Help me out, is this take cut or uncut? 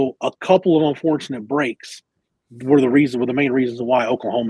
uncut